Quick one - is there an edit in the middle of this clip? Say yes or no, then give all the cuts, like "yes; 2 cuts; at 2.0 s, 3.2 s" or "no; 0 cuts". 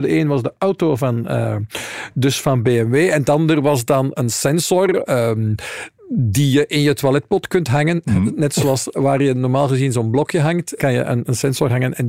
yes; 1 cut; at 10.8 s